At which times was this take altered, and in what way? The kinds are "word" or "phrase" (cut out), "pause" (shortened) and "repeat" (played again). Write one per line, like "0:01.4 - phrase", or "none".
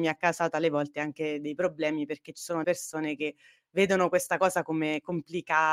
0:02.6 - word